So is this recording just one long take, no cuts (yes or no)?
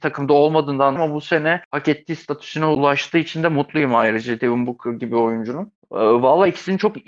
no